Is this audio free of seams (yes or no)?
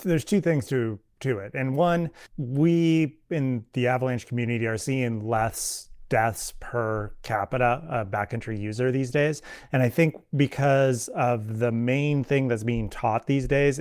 yes